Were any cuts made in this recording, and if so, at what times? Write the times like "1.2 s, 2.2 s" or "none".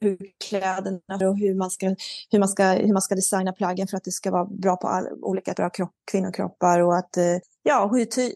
1.2 s, 5.6 s

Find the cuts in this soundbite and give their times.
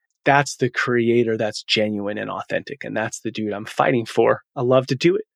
4.5 s

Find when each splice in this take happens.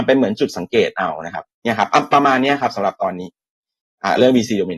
1.5 s

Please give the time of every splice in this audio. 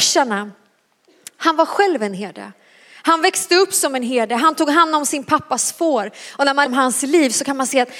6.7 s

